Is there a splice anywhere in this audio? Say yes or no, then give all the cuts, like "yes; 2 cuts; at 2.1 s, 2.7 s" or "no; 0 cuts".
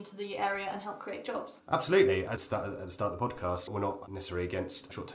yes; 1 cut; at 2.4 s